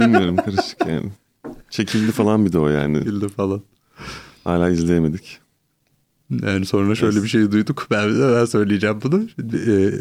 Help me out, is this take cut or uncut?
cut